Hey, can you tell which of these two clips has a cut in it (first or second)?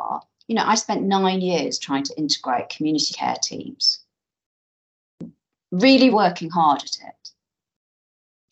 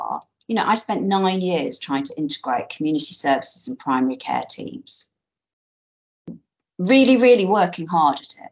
first